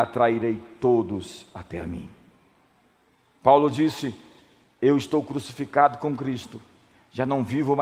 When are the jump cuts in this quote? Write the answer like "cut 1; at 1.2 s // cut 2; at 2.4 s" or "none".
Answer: none